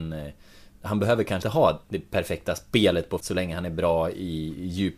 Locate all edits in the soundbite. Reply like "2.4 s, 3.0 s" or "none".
1.4 s, 3.2 s